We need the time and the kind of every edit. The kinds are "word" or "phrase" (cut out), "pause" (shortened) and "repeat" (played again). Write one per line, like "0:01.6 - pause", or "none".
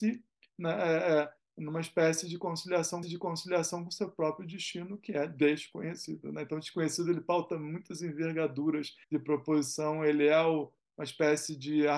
0:03.0 - repeat
0:09.0 - pause